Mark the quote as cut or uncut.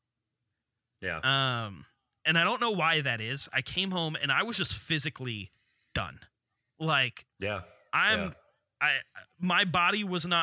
uncut